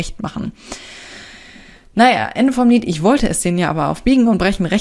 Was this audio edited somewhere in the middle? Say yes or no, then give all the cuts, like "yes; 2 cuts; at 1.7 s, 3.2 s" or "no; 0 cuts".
no; 0 cuts